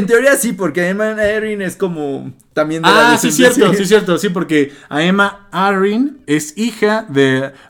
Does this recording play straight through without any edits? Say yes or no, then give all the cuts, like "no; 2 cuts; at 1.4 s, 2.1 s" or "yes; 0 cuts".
yes; 0 cuts